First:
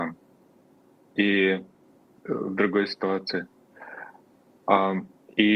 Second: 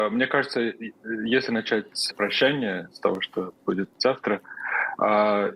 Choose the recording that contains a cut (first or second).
second